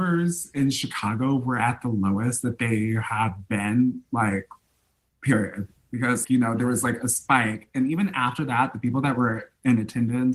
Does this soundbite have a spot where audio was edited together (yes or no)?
yes